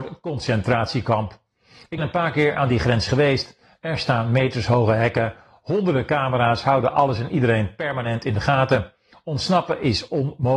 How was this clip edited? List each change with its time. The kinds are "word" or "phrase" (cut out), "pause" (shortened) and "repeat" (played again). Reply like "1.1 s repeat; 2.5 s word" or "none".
2.0 s word